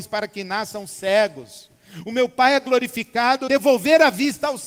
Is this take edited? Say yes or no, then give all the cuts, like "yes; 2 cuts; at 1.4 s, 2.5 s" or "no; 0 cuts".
yes; 1 cut; at 3.5 s